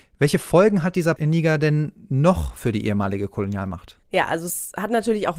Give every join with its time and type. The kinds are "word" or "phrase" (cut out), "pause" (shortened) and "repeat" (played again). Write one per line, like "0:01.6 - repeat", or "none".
0:01.2 - word
0:04.0 - pause